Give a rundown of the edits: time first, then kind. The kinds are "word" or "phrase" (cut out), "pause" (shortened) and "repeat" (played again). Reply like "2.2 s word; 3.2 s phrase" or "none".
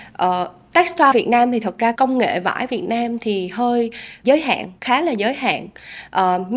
1.1 s word; 1.9 s word; 4.2 s word; 4.8 s pause